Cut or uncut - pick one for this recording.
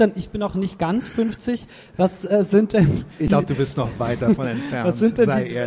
uncut